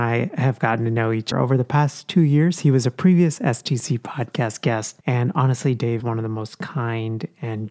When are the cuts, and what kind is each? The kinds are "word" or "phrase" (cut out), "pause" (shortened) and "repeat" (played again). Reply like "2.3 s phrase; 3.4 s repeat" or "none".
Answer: 1.3 s word; 5.0 s pause; 6.0 s word